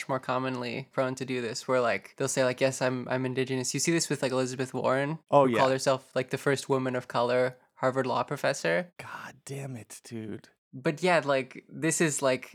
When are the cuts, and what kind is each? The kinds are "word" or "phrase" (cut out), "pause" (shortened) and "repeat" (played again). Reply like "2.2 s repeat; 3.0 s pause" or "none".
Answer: 0.9 s word